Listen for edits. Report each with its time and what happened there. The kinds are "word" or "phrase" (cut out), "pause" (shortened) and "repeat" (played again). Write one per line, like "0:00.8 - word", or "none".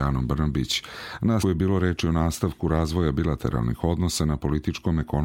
0:01.4 - word